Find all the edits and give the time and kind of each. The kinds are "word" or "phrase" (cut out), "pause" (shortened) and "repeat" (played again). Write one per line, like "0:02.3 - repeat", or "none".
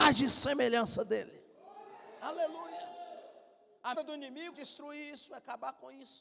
0:03.9 - word
0:04.5 - word